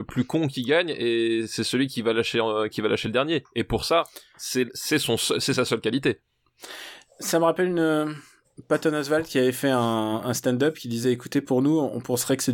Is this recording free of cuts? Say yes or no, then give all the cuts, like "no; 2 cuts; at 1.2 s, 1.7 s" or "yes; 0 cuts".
yes; 0 cuts